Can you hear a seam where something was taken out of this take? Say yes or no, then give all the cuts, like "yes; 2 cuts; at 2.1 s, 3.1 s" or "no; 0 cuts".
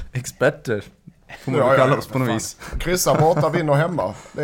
no; 0 cuts